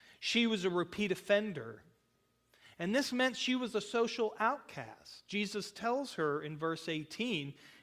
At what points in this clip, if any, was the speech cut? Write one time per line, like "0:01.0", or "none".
none